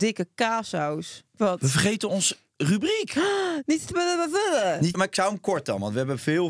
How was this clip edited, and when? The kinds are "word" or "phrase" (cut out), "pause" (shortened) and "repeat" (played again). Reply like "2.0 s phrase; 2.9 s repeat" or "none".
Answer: 1.3 s pause; 4.9 s word